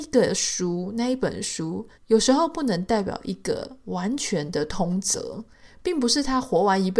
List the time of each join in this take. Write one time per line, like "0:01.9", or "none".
0:02.0